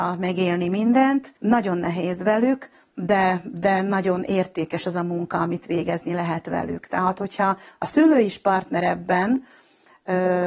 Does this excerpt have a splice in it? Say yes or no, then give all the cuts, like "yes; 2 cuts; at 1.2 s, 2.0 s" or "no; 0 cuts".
yes; 1 cut; at 1.4 s